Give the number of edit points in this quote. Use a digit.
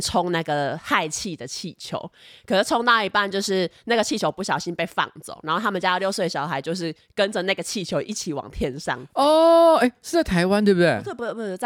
0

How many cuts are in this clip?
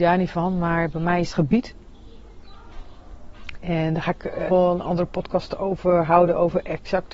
2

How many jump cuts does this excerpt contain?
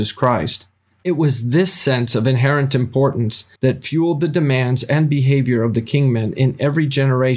1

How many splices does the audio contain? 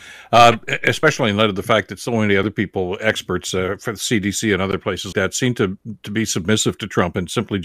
1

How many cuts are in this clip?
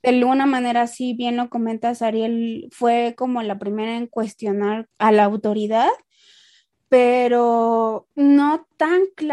2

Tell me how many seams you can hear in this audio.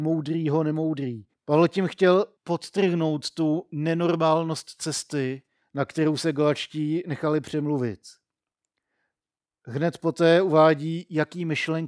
3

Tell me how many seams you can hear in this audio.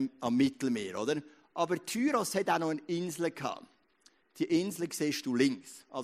0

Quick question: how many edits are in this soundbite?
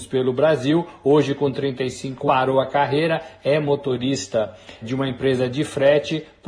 2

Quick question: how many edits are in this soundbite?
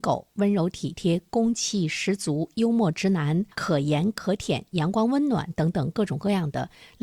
1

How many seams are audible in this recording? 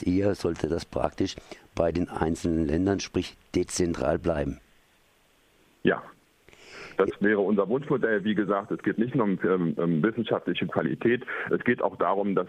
0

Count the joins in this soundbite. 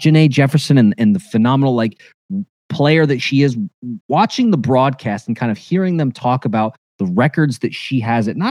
1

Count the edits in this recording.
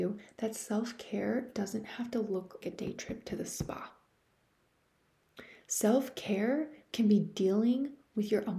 1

